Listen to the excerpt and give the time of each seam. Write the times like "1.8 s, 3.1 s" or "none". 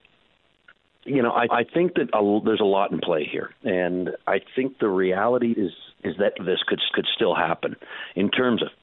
1.5 s, 5.5 s, 5.9 s, 6.4 s, 6.9 s